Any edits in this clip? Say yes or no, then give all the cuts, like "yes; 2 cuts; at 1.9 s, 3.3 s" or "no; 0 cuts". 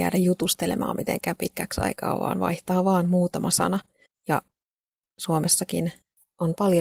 yes; 1 cut; at 4.1 s